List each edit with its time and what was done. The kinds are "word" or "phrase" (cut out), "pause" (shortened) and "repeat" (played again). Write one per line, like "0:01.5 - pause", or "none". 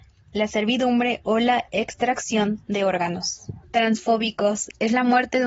0:03.6 - pause